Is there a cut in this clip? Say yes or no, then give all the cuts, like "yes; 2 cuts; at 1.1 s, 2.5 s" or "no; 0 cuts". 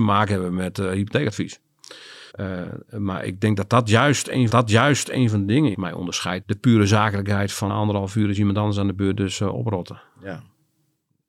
yes; 5 cuts; at 2.3 s, 4.5 s, 5.7 s, 6.4 s, 7.7 s